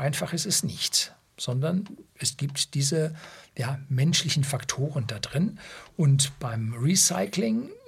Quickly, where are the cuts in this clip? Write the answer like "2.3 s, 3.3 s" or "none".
2.1 s